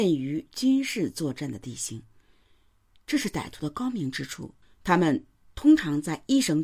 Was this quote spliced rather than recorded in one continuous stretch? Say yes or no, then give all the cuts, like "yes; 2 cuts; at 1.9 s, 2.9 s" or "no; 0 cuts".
yes; 1 cut; at 4.6 s